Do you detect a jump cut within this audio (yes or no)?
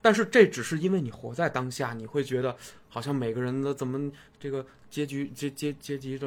no